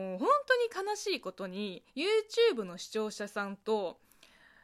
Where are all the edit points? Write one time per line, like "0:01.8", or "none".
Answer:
0:01.9